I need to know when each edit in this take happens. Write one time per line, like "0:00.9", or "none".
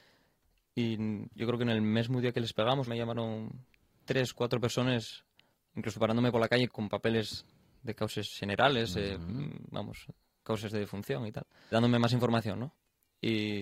0:02.9
0:06.7
0:11.7